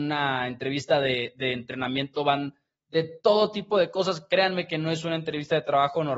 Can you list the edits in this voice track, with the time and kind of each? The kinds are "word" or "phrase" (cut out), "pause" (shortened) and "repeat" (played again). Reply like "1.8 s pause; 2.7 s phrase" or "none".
none